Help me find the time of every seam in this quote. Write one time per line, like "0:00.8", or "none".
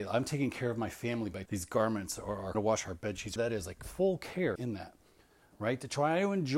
0:01.5
0:02.5
0:03.4
0:03.8
0:04.6